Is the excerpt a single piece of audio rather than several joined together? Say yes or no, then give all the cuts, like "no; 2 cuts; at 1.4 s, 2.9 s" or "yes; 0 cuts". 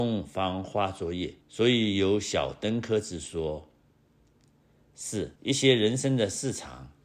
no; 2 cuts; at 1.4 s, 5.4 s